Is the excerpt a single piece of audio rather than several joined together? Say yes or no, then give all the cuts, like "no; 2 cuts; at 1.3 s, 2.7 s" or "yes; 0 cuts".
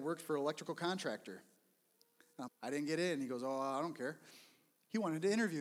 no; 1 cut; at 2.5 s